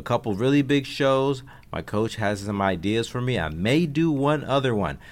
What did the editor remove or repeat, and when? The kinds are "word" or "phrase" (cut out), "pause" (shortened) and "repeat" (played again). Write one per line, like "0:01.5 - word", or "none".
none